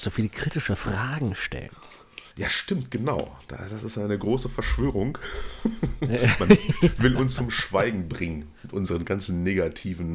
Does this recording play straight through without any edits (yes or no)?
no